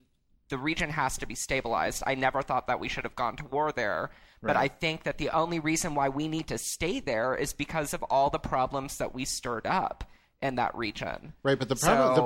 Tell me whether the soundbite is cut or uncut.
uncut